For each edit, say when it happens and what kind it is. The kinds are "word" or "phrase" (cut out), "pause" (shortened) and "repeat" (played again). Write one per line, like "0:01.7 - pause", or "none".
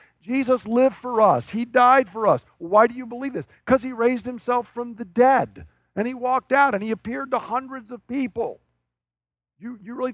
none